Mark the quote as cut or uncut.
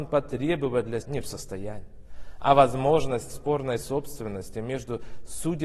cut